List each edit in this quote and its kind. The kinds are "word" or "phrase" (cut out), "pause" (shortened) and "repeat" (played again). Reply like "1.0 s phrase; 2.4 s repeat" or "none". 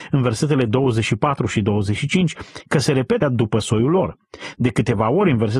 3.2 s word